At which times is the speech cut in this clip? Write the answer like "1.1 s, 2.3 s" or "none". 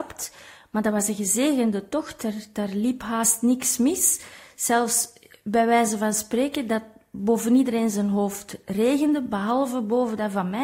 none